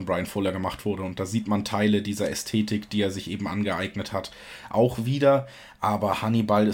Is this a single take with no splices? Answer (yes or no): yes